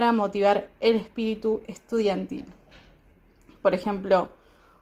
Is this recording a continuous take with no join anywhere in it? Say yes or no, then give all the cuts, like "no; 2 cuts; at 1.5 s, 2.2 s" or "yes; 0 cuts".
yes; 0 cuts